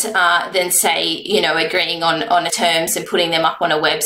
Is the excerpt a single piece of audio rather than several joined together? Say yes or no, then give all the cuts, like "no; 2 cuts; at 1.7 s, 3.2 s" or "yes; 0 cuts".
no; 1 cut; at 2.5 s